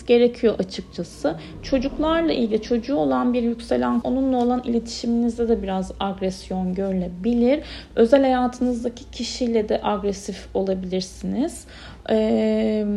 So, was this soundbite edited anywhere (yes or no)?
yes